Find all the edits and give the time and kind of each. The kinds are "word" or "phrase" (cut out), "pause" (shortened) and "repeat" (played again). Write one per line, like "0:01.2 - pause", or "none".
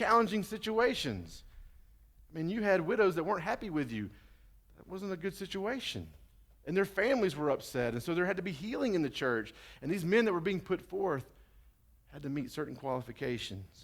none

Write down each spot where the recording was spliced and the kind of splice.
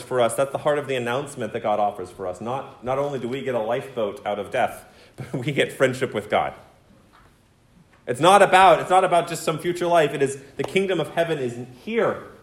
none

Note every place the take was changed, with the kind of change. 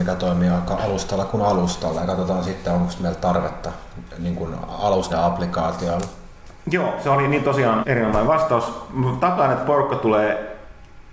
0:05.1 - phrase
0:07.8 - word

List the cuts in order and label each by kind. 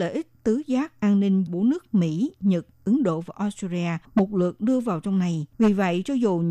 0:01.5 - word
0:04.0 - pause
0:05.5 - pause

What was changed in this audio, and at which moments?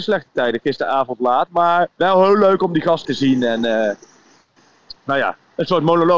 0:01.9 - pause
0:03.0 - word

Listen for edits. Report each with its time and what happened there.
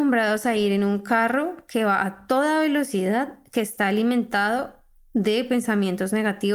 none

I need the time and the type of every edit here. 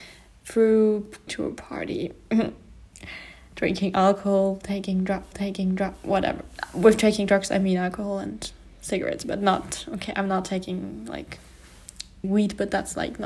0:01.3 - word
0:05.3 - repeat
0:09.2 - word
0:12.2 - word

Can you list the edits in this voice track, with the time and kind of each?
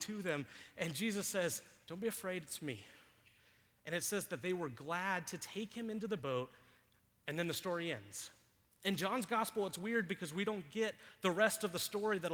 none

